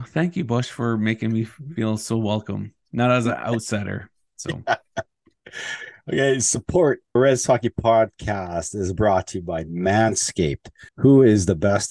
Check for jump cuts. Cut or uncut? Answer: cut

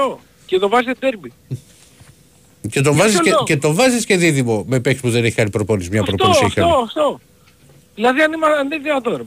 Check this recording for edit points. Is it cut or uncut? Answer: uncut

